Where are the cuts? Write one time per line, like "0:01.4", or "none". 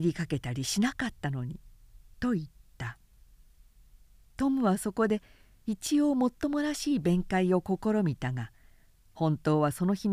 none